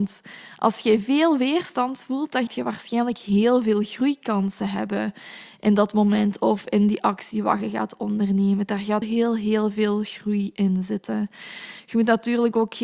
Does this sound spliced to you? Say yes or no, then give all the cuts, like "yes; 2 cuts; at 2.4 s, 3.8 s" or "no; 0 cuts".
yes; 2 cuts; at 2.5 s, 9.0 s